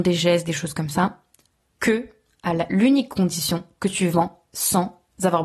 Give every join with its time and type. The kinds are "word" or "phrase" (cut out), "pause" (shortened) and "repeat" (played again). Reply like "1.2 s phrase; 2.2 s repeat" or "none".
4.5 s word

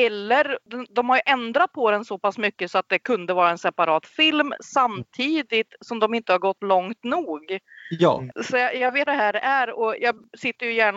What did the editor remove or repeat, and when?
8.3 s pause; 9.1 s phrase; 10.0 s word

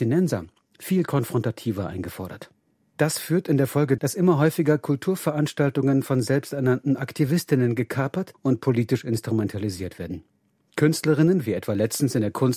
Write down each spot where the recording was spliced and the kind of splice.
4.0 s word

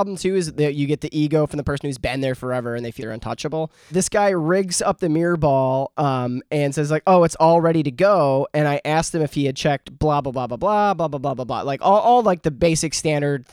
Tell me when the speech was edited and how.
3.0 s word

